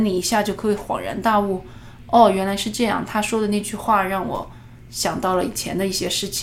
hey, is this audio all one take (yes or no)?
yes